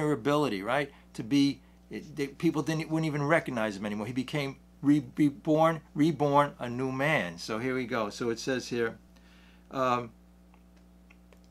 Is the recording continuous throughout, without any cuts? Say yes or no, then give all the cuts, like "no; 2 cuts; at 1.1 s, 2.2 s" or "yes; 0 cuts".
yes; 0 cuts